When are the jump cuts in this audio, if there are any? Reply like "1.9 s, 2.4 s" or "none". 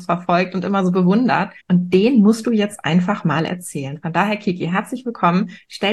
1.6 s

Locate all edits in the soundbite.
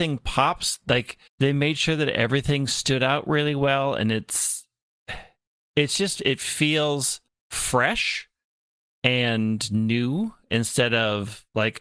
1.3 s, 7.3 s

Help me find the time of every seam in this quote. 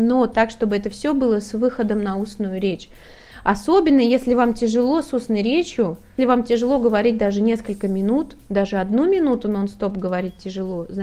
6.2 s

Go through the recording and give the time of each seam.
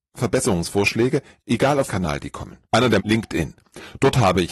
1.4 s, 1.9 s, 2.7 s, 3.0 s

